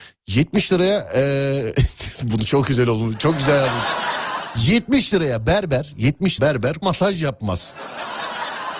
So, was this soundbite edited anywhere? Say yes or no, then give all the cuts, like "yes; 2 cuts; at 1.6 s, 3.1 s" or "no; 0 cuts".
yes; 2 cuts; at 6.4 s, 6.8 s